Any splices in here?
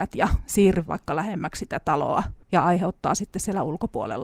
yes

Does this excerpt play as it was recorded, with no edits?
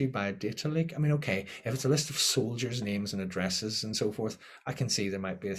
yes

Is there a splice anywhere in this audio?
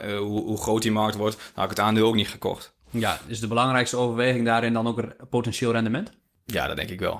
no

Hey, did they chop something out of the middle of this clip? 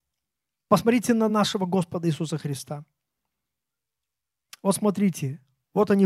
no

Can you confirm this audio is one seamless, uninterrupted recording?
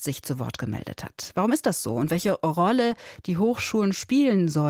yes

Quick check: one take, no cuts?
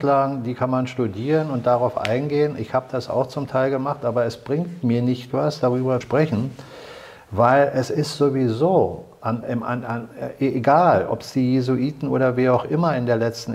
no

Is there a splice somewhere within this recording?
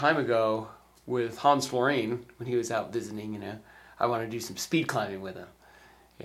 no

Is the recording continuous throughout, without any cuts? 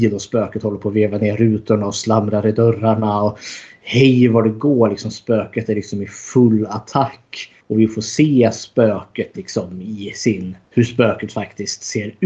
no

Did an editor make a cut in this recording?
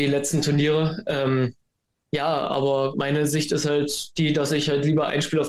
yes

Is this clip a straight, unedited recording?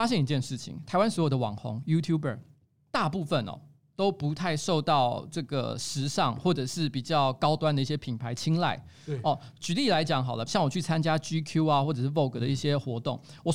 yes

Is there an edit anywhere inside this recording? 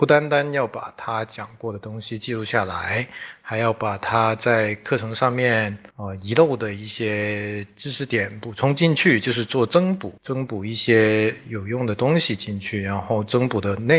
yes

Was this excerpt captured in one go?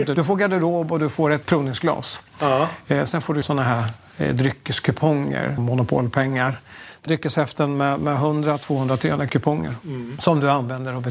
no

